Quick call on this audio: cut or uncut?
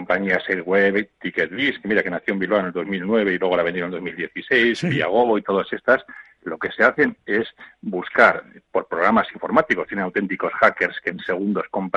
uncut